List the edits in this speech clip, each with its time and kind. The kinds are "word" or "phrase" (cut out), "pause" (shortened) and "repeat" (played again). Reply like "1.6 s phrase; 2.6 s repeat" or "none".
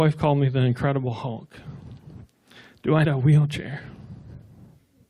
3.0 s word